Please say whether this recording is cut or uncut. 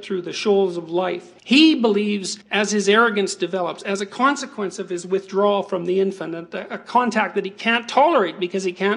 cut